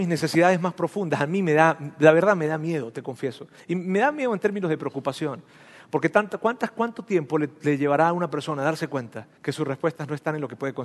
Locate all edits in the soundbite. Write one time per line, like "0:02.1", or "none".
0:09.4